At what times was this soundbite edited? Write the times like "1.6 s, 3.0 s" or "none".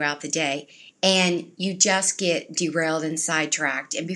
none

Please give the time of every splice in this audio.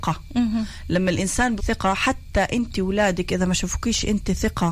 1.6 s

